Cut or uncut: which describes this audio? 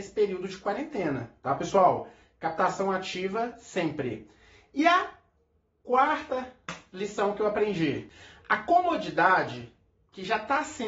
uncut